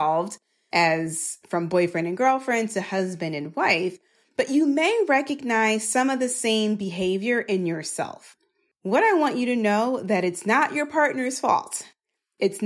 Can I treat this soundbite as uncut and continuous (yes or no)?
yes